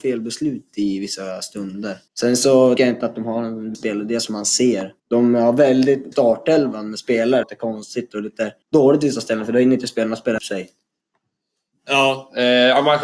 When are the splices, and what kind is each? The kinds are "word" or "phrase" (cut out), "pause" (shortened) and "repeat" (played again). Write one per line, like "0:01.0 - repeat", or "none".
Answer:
0:02.1 - pause
0:02.8 - word
0:03.7 - word
0:05.0 - pause
0:06.1 - phrase
0:07.4 - phrase
0:08.6 - pause
0:10.4 - word